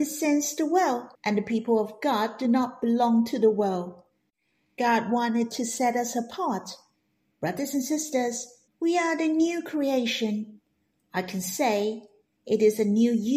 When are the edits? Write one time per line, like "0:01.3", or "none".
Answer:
0:01.1
0:08.7